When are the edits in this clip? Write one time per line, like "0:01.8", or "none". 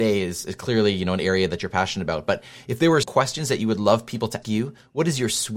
0:03.0
0:04.4